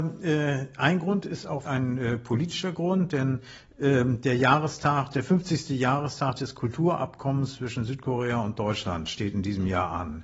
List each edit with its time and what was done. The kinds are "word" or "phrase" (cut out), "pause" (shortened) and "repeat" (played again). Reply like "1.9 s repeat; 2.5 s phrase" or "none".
1.7 s word

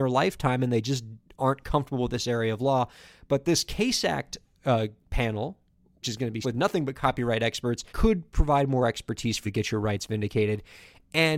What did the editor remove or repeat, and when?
6.0 s word; 6.4 s word; 7.9 s pause; 9.4 s word

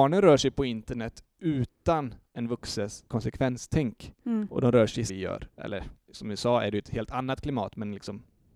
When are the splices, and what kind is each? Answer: 3.1 s word; 5.1 s phrase; 5.5 s pause

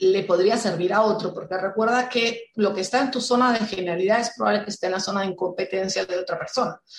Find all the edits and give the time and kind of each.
none

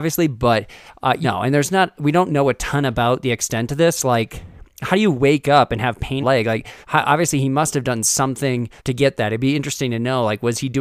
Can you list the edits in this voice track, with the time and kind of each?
1.2 s phrase; 6.2 s phrase; 6.8 s pause; 8.8 s pause

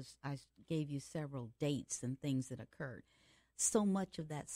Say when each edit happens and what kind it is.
none

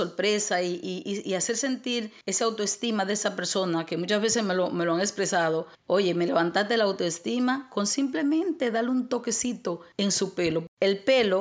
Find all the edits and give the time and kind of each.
none

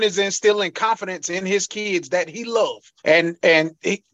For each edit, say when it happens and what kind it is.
3.0 s pause

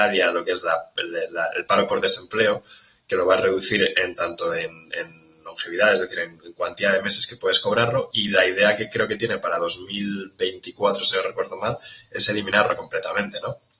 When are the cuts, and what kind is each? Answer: none

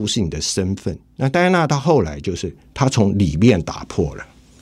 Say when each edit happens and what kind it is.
none

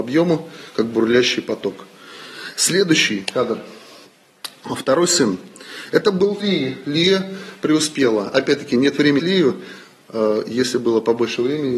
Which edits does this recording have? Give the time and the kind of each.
6.4 s word; 9.2 s word

